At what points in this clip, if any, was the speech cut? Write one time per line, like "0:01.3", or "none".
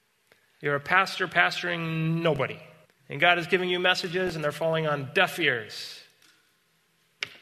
0:02.8